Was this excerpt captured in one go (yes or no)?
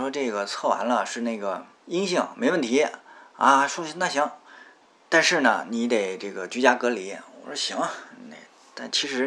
no